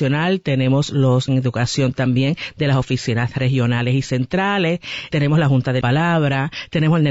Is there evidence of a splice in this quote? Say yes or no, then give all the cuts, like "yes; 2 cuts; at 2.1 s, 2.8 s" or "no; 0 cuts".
yes; 3 cuts; at 1.3 s, 5.1 s, 5.8 s